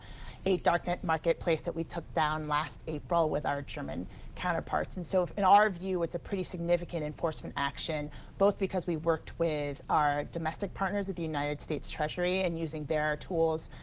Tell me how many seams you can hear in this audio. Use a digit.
0